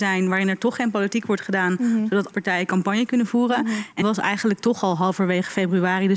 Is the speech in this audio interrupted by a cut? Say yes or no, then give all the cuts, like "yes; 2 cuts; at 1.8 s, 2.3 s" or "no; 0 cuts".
yes; 2 cuts; at 2.3 s, 4.0 s